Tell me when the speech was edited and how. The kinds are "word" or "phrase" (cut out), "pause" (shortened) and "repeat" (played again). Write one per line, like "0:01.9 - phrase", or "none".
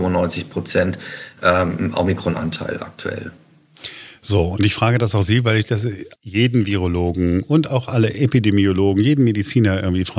0:06.1 - pause